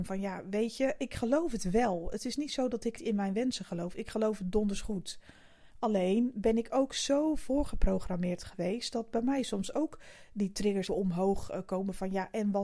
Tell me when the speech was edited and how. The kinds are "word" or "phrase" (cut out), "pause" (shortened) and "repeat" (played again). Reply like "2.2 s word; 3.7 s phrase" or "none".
3.0 s word; 5.7 s pause; 10.9 s word